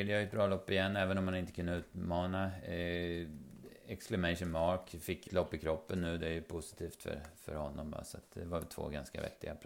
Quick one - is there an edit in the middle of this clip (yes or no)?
yes